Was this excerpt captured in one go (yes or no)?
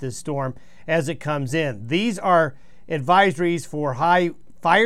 yes